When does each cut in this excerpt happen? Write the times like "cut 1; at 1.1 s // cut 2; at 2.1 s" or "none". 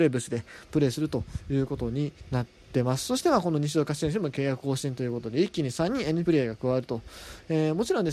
cut 1; at 2.2 s // cut 2; at 6.2 s